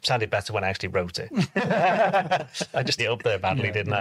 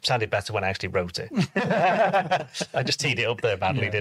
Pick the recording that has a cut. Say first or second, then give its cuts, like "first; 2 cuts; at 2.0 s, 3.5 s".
first; 1 cut; at 3.0 s